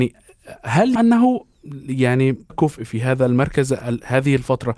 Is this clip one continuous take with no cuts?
no; 2 cuts; at 1.0 s, 2.5 s

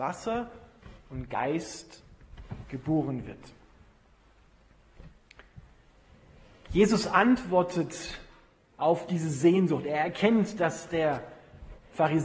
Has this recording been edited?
no; 0 cuts

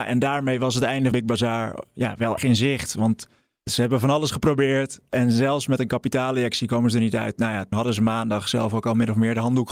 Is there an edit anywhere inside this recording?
yes; 3 cuts; at 1.1 s, 2.4 s, 7.7 s

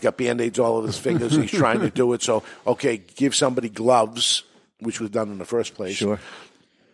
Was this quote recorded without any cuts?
no; 1 cut; at 5.0 s

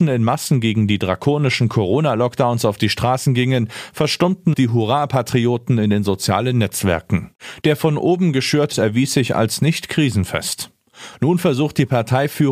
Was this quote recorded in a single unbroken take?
no; 2 cuts; at 4.5 s, 8.7 s

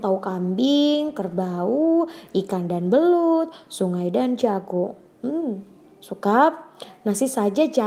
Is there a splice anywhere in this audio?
no; 0 cuts

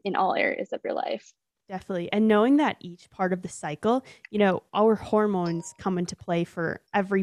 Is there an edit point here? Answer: no; 0 cuts

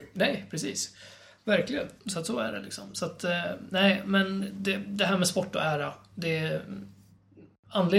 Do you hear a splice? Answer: no; 0 cuts

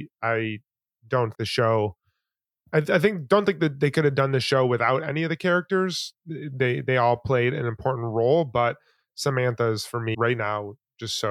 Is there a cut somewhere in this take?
yes; 3 cuts; at 1.3 s, 6.1 s, 10.1 s

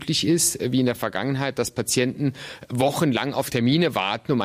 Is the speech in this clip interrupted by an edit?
no; 0 cuts

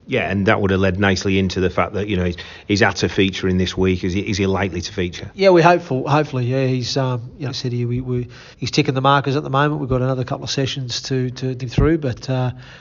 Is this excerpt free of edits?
no; 3 cuts; at 7.5 s, 8.5 s, 11.6 s

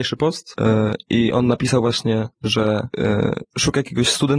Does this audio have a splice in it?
no; 0 cuts

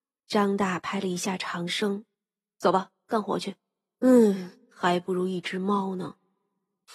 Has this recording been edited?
yes; 1 cut; at 2.1 s

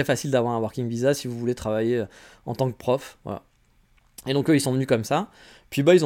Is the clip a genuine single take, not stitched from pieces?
yes; 0 cuts

